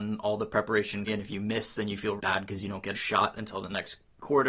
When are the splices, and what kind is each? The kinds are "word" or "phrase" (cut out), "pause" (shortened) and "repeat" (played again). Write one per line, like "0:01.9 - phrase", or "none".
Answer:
0:01.1 - word
0:02.2 - word
0:02.9 - word